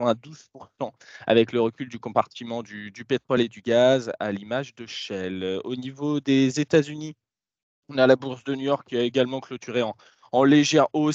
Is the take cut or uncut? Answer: uncut